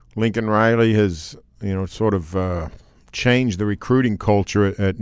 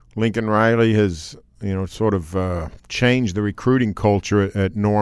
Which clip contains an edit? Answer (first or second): second